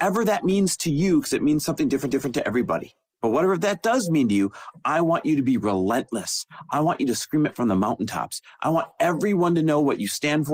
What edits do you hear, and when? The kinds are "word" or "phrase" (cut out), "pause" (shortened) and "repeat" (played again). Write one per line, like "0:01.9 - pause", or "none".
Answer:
0:02.1 - repeat
0:03.1 - pause